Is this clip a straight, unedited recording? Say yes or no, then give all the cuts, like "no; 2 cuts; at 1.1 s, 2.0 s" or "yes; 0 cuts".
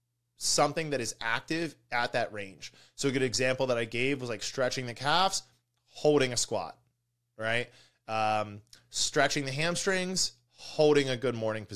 yes; 0 cuts